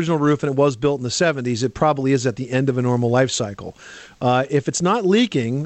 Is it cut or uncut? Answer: uncut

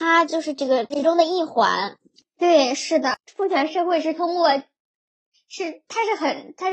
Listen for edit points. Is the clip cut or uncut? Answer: uncut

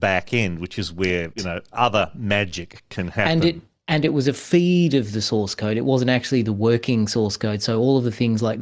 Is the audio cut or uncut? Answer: cut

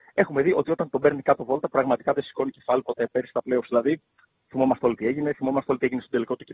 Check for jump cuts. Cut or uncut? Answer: uncut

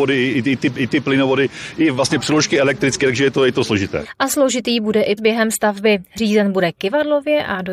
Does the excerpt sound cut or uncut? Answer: cut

